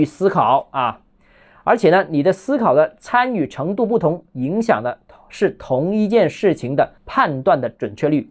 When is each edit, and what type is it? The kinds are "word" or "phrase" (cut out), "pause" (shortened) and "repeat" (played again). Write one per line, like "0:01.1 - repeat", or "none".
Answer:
0:07.0 - pause